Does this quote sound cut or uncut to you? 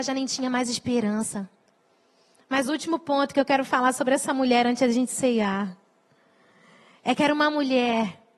uncut